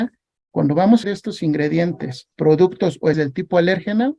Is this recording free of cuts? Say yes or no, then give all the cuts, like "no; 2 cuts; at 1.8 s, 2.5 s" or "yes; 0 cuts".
no; 3 cuts; at 1.0 s, 2.3 s, 3.1 s